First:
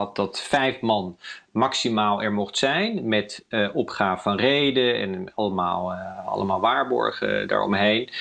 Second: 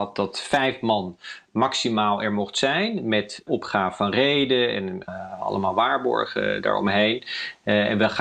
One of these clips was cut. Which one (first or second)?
second